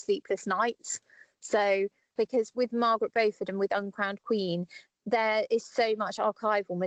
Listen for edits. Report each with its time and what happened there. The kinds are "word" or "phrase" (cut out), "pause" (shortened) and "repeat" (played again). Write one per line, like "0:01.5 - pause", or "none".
0:02.2 - phrase